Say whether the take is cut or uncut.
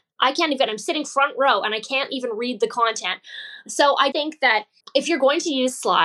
cut